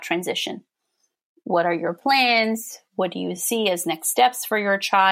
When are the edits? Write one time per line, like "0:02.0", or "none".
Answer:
none

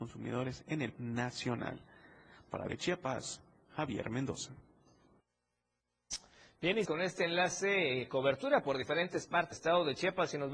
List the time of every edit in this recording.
0:00.9
0:02.7
0:06.9
0:09.5

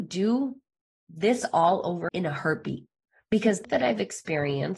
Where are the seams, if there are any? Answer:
0:02.1
0:03.1
0:03.6

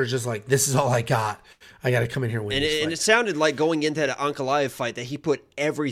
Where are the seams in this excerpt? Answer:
none

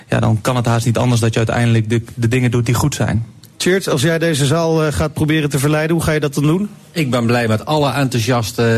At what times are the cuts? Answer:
none

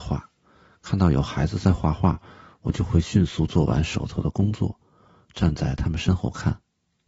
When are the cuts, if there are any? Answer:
none

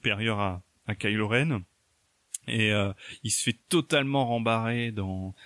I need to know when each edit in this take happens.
none

